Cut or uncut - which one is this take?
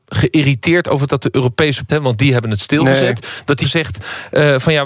cut